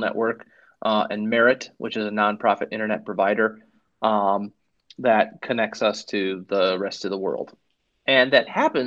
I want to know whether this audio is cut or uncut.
uncut